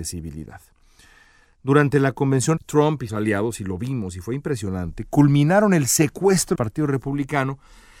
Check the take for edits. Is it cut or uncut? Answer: cut